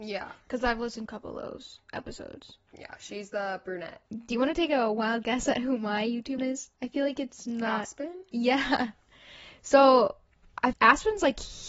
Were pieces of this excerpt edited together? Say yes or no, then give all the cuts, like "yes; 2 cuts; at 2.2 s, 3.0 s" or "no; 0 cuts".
yes; 5 cuts; at 1.1 s, 4.1 s, 6.4 s, 6.7 s, 10.7 s